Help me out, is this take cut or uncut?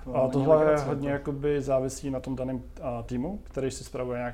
uncut